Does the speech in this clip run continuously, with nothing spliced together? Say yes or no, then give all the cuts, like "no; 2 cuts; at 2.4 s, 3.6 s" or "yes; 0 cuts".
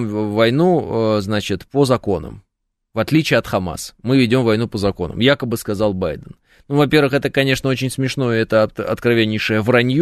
yes; 0 cuts